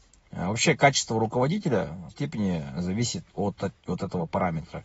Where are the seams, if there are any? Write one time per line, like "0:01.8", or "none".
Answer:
0:02.1
0:03.6